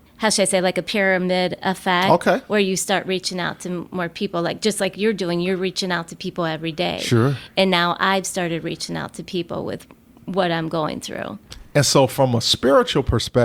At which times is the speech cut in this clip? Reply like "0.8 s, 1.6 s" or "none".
none